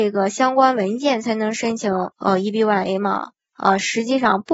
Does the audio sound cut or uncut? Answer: cut